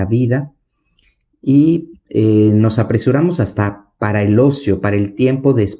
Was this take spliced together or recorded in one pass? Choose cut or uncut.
uncut